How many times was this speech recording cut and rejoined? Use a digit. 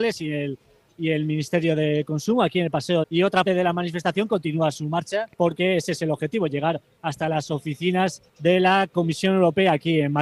4